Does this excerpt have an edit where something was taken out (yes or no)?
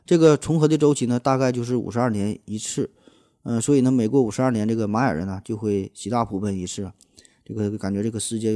no